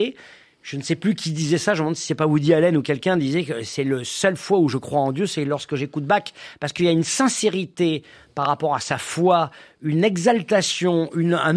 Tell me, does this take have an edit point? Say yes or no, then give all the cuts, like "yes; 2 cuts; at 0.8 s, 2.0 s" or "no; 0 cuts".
no; 0 cuts